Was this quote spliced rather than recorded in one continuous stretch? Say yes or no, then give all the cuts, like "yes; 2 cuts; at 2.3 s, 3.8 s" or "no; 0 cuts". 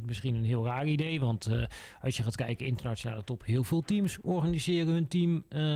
no; 0 cuts